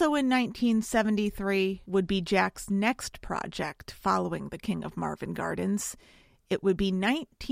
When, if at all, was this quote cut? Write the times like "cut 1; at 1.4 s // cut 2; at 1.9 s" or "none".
none